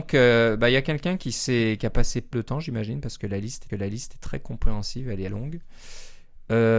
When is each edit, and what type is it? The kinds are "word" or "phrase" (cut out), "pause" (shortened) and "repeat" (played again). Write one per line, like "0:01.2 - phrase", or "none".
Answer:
0:02.3 - word
0:03.7 - repeat
0:05.3 - word